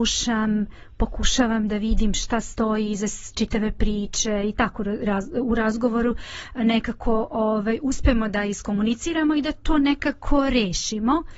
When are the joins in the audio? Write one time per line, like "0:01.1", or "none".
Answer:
none